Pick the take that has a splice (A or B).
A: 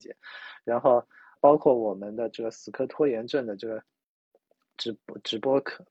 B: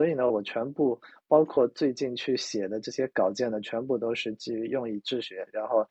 A